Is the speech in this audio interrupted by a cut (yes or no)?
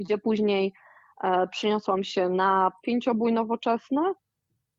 no